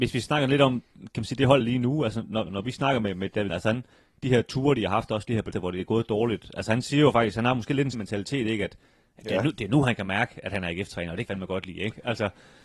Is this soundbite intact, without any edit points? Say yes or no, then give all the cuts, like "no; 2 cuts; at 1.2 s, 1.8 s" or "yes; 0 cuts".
no; 6 cuts; at 1.6 s, 2.5 s, 3.5 s, 5.5 s, 7.9 s, 11.3 s